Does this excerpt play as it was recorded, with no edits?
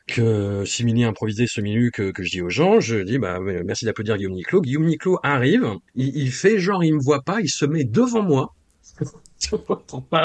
no; 1 cut; at 5.9 s

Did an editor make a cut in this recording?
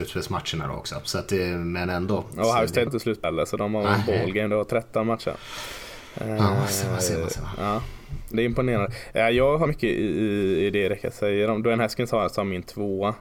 yes; 4 cuts; at 2.9 s, 3.2 s, 8.3 s, 9.7 s

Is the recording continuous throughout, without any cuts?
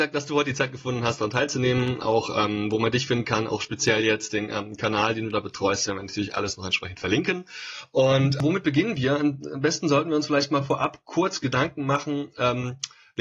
yes; 0 cuts

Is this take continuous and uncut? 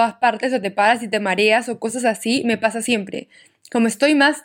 yes; 0 cuts

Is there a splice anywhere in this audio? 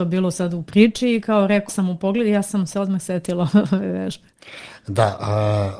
yes; 1 cut; at 1.7 s

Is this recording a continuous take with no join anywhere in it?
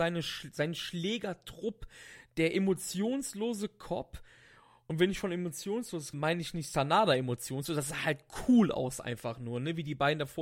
no; 1 cut; at 6.1 s

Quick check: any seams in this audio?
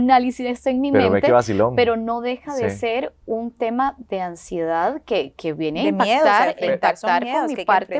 yes; 1 cut; at 3.2 s

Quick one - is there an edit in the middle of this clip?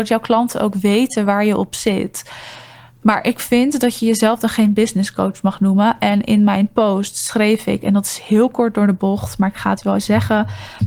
yes; 1 cut; at 9.9 s

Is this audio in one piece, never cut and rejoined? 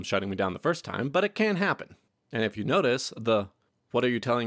yes; 0 cuts

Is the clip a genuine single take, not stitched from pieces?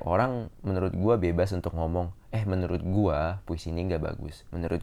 yes; 0 cuts

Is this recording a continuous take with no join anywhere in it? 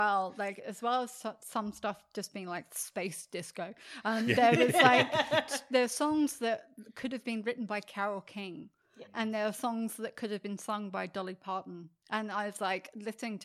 yes; 0 cuts

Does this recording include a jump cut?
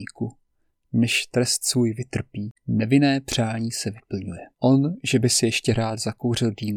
yes; 2 cuts; at 2.6 s, 4.5 s

